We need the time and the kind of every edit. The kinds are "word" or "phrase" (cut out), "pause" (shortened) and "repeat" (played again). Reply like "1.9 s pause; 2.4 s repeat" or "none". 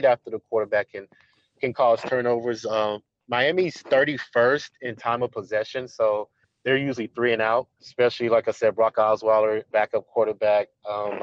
6.4 s pause; 7.7 s pause; 9.7 s word